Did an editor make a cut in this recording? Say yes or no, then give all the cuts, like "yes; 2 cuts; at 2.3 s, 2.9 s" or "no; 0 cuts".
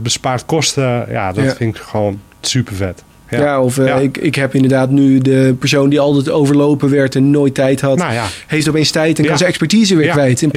no; 0 cuts